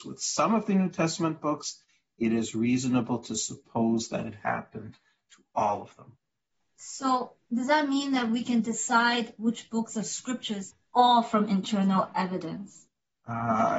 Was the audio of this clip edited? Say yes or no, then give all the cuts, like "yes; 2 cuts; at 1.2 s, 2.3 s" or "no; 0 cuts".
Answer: no; 0 cuts